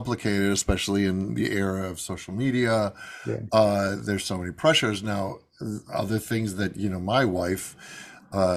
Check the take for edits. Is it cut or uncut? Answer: uncut